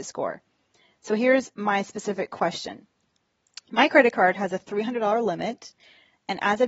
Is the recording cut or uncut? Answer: uncut